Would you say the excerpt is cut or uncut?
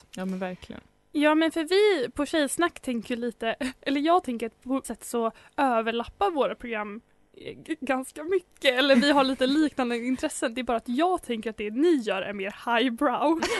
cut